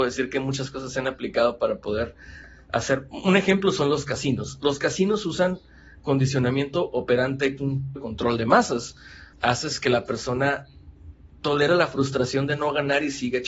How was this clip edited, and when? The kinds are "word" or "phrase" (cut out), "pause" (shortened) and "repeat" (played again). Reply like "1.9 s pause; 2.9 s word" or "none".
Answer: 7.6 s phrase; 8.0 s word; 9.3 s pause; 11.3 s word